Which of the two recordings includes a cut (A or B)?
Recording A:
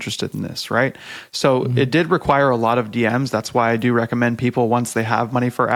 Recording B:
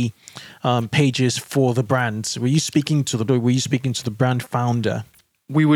B